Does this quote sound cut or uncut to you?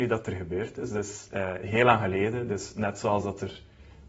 uncut